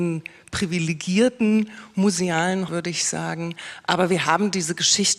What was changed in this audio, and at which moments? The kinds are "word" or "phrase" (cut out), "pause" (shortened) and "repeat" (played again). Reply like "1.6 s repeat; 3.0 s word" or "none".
2.7 s word

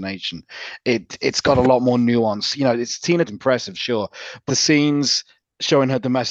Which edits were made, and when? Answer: 3.3 s phrase; 4.5 s word

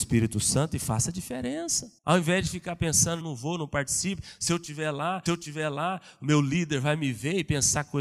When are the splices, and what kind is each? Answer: 2.0 s pause; 3.2 s word; 5.3 s repeat

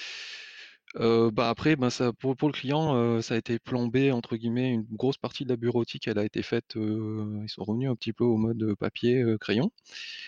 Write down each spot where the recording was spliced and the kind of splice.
none

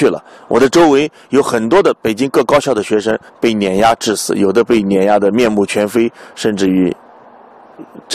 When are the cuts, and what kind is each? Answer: 3.3 s pause

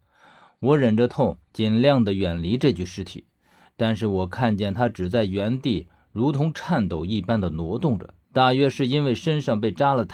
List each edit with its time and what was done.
1.4 s pause; 8.2 s pause

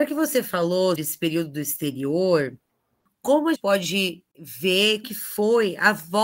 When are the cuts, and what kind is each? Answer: 1.0 s word; 3.6 s word; 5.0 s word

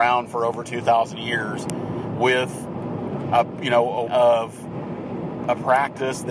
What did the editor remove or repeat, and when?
4.1 s word

